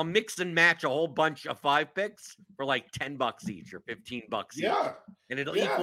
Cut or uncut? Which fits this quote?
uncut